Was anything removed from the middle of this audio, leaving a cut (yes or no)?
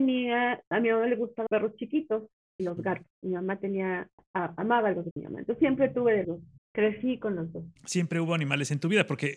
yes